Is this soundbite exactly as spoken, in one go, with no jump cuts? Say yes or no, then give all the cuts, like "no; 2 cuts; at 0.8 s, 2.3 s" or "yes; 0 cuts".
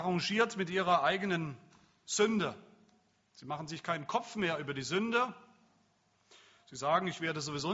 yes; 0 cuts